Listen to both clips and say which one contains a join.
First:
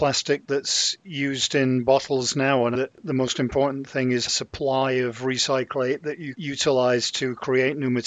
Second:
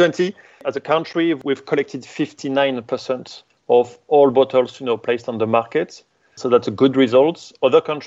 first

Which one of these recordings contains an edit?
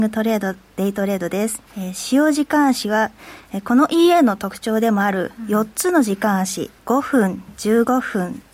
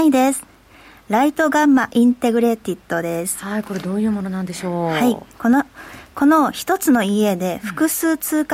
first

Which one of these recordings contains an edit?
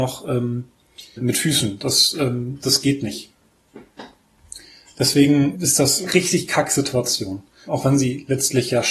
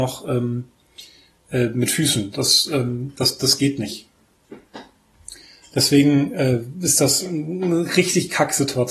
first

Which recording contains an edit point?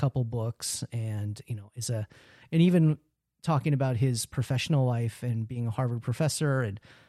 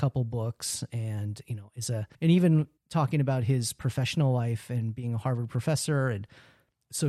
second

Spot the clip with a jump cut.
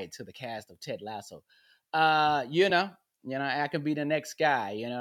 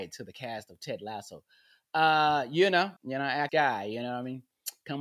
second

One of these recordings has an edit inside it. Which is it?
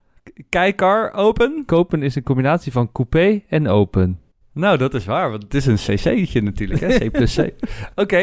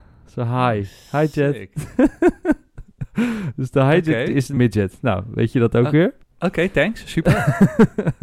second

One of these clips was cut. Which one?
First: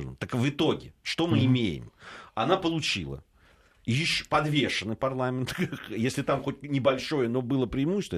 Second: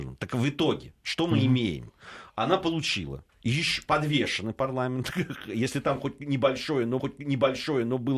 second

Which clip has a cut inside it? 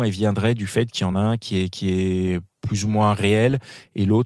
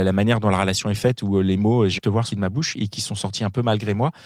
second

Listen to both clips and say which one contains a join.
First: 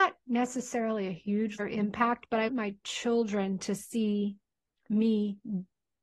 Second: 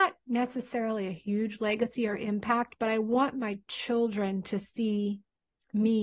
first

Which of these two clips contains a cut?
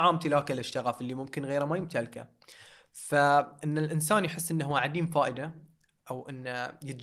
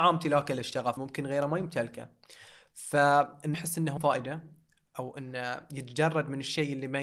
second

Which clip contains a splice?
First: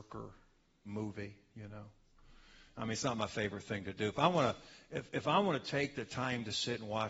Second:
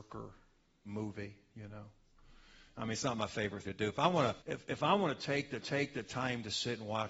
second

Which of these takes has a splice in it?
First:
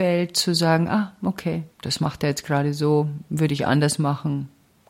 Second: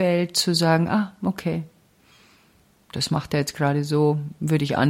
first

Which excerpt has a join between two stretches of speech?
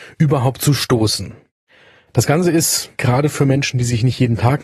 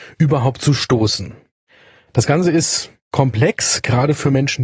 first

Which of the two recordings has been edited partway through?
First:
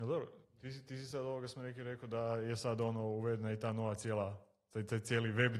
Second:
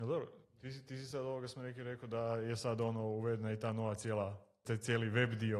second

